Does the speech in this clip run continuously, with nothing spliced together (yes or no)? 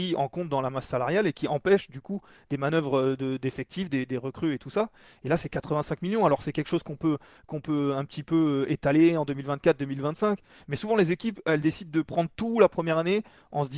yes